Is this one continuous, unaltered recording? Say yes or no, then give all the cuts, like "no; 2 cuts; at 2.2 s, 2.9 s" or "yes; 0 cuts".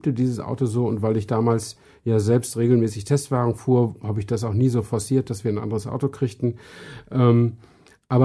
yes; 0 cuts